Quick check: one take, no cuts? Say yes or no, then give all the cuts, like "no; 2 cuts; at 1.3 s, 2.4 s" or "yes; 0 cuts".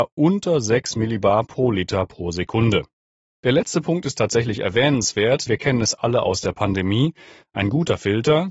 no; 1 cut; at 5.5 s